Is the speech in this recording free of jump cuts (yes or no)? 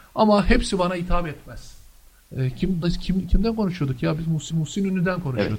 no